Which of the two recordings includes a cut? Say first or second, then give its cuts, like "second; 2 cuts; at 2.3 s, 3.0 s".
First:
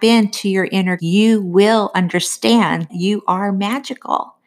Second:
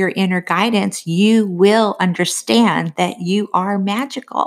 first; 2 cuts; at 1.0 s, 2.9 s